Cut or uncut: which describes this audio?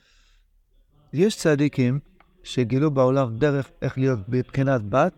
uncut